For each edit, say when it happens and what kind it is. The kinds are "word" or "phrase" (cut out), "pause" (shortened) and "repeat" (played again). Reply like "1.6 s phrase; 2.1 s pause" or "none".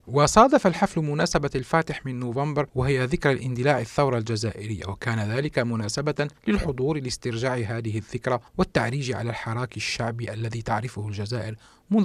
2.7 s pause; 6.4 s pause; 8.5 s pause